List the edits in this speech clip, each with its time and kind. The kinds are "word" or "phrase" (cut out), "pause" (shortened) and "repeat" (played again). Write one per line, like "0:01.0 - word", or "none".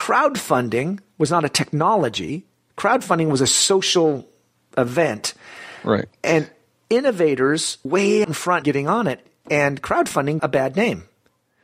0:07.9 - word
0:08.2 - word
0:08.6 - word
0:10.4 - word